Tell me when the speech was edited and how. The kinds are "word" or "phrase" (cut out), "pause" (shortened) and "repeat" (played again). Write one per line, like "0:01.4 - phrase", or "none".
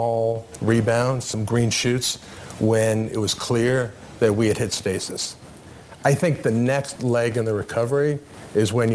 none